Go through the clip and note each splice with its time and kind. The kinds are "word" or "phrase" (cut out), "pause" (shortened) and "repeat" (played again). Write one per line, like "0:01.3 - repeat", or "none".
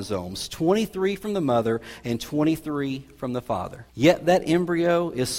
0:03.9 - pause

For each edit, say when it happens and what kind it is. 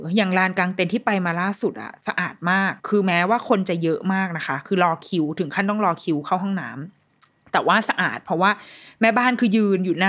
0:02.8 - pause

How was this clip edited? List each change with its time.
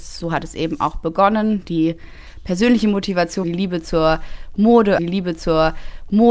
0:03.4 - phrase
0:05.0 - repeat

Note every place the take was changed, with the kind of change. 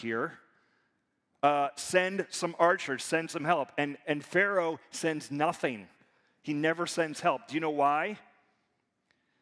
none

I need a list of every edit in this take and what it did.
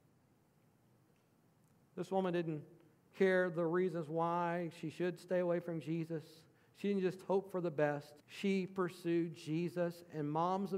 0:08.2 - pause

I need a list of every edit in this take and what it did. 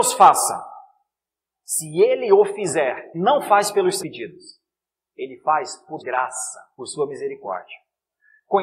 0:03.1 - word
0:04.0 - word
0:06.0 - word
0:06.8 - word

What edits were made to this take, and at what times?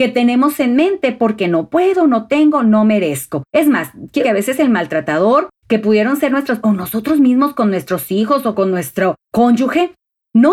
0:03.5 - pause
0:04.2 - word
0:05.6 - pause
0:06.6 - word
0:09.2 - pause

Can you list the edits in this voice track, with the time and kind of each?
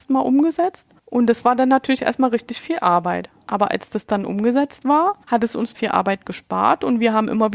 0:01.0 - pause
0:05.2 - pause
0:05.7 - word

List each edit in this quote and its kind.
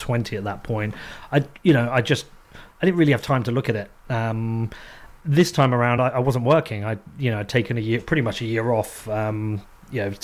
none

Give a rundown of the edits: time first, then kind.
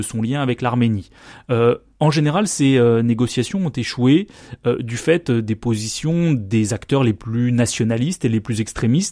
none

